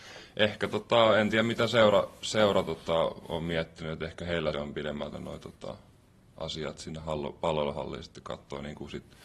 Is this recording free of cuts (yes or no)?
no